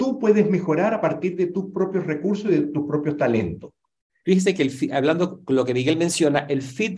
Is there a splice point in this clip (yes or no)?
no